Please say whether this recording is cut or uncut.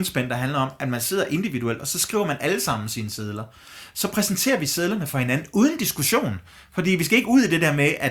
uncut